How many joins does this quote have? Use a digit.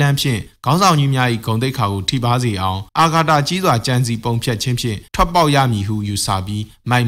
2